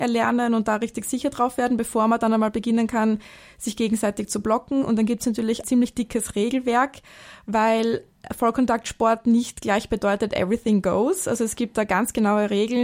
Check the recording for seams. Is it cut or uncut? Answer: cut